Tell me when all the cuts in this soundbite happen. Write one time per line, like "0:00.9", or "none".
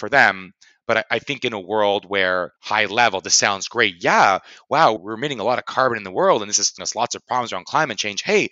0:02.6
0:05.0
0:06.8